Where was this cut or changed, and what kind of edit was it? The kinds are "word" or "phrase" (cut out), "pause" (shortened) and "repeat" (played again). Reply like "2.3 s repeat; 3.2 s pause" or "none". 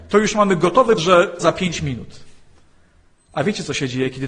1.0 s word; 1.4 s word